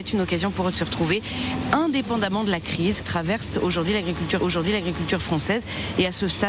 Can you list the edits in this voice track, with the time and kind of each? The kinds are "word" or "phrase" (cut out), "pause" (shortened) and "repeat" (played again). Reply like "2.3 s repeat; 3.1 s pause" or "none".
3.0 s word; 4.4 s repeat

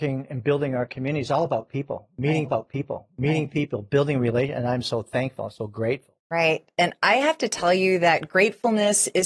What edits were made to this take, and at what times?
2.4 s repeat; 6.2 s pause

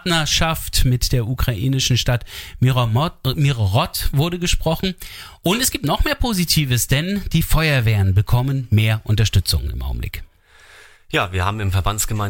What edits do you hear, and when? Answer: none

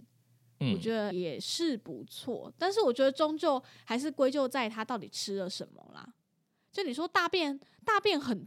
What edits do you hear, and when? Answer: 1.1 s word

